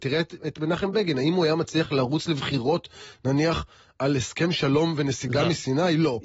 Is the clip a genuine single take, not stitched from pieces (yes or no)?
yes